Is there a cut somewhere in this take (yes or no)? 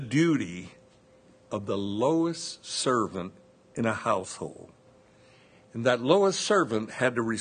no